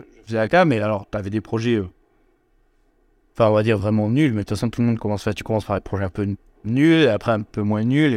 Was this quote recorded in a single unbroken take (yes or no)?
yes